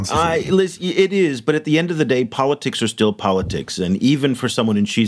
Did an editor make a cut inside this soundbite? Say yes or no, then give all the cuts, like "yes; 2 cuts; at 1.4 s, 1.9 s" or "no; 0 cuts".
no; 0 cuts